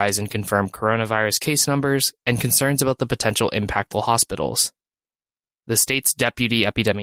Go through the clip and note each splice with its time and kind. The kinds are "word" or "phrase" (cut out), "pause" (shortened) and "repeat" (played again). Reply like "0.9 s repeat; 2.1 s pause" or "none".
3.9 s word